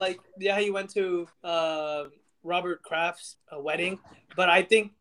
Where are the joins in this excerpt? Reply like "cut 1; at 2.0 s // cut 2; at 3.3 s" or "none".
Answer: cut 1; at 1.3 s // cut 2; at 3.3 s